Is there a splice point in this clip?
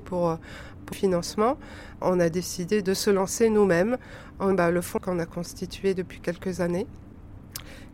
yes; 5 cuts; at 0.9 s, 2.0 s, 2.8 s, 4.5 s, 5.0 s

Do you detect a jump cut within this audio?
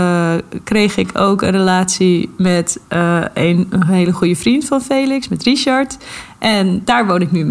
no; 0 cuts

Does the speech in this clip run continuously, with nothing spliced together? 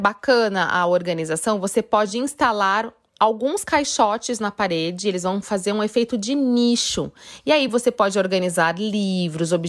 yes; 0 cuts

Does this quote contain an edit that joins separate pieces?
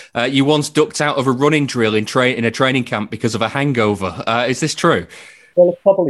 no; 0 cuts

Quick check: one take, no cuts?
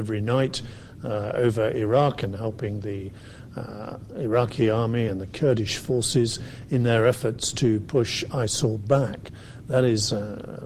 yes; 0 cuts

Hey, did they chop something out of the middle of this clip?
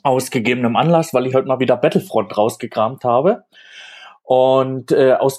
yes; 1 cut; at 1.3 s

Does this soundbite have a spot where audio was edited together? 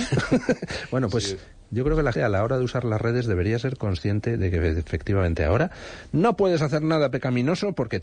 yes; 1 cut; at 2.1 s

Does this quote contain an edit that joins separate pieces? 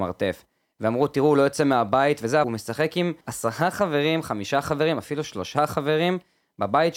yes; 2 cuts; at 2.4 s, 3.2 s

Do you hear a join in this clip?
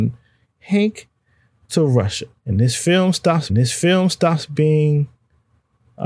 yes; 3 cuts; at 1.7 s, 2.4 s, 3.5 s

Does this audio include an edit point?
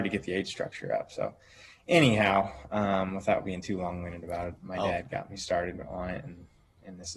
no; 0 cuts

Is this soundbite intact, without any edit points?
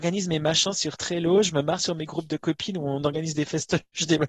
yes; 0 cuts

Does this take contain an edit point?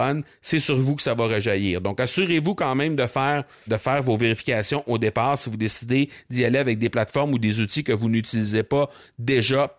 yes; 1 cut; at 3.7 s

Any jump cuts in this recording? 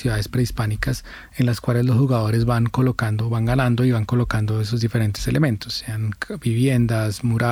no; 0 cuts

